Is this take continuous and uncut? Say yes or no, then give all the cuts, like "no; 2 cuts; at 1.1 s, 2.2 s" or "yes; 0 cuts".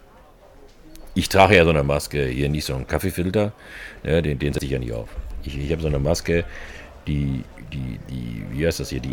yes; 0 cuts